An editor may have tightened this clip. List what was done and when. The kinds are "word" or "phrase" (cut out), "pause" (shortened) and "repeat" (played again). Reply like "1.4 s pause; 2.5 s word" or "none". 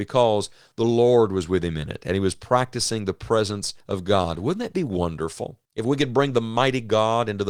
3.8 s pause; 5.6 s pause